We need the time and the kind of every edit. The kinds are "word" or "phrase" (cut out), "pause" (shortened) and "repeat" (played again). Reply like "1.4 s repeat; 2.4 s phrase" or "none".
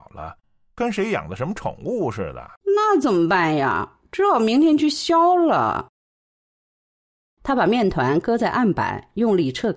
2.6 s pause